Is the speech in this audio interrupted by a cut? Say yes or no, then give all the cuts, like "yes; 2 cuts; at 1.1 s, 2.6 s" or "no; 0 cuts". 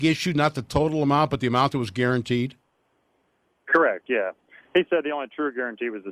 no; 0 cuts